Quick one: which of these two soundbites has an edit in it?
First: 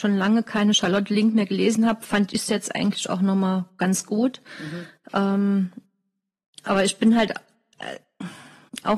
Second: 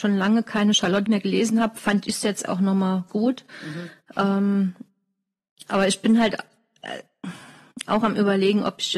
second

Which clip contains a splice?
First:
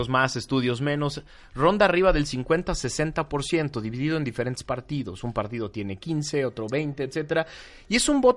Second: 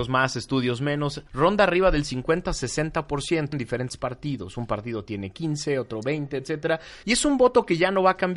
second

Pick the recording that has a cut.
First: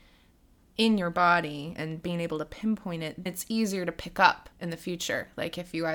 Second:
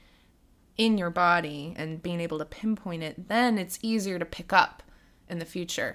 first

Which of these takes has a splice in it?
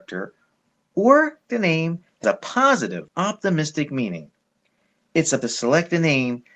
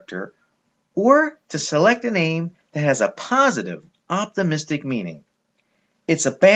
first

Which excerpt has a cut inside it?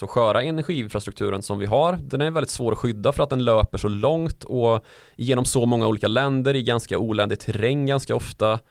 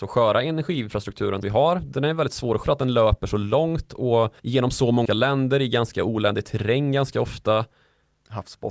second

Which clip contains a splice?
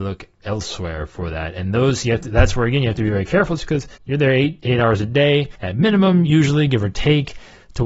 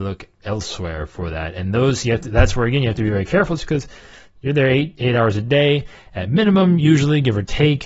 first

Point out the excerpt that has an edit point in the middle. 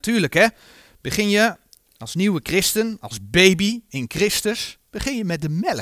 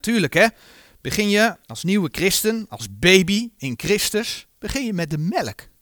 second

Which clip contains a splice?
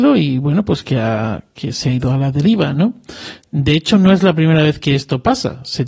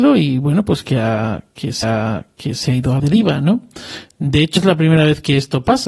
second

